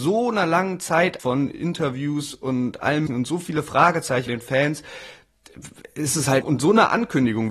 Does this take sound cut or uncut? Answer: cut